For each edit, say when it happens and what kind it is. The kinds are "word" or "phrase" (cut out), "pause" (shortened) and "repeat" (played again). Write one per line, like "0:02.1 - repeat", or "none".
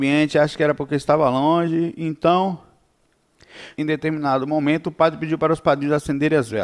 0:03.8 - phrase